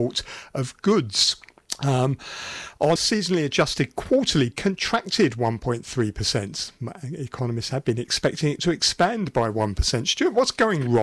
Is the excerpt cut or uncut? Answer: cut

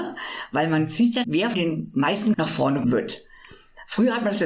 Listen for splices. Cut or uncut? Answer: cut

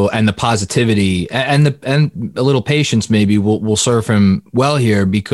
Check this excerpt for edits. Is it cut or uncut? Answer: uncut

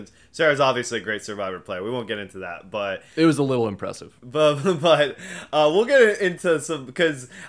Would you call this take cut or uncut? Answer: uncut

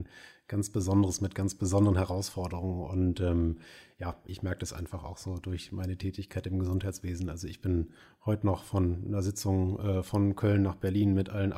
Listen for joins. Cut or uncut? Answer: uncut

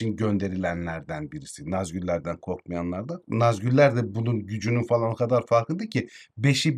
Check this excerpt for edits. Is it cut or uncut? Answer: uncut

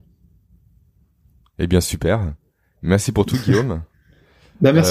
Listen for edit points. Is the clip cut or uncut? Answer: uncut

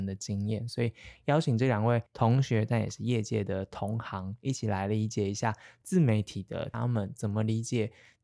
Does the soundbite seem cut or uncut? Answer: cut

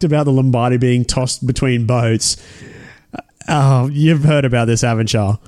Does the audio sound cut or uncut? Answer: cut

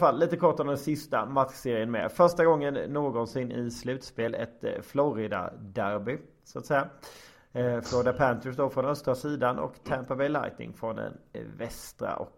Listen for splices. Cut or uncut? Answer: uncut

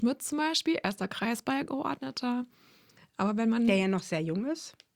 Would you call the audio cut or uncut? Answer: uncut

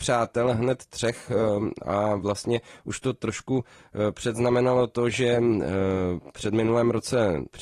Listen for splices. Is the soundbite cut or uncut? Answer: uncut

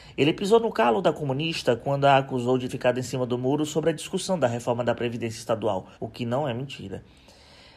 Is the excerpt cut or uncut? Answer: cut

